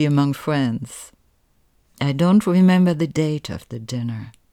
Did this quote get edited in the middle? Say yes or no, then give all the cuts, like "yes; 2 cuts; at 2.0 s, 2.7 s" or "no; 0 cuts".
no; 0 cuts